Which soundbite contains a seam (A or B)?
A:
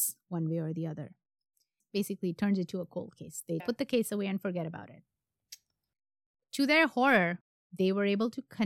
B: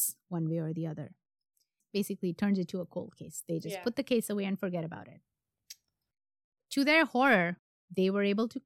A